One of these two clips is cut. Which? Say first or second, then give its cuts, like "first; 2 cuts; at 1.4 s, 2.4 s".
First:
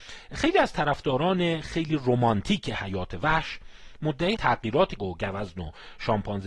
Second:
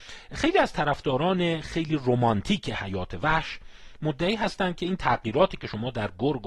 first; 2 cuts; at 4.4 s, 5.0 s